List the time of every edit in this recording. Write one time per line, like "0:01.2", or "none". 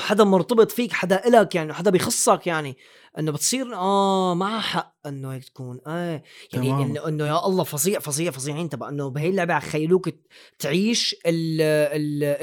none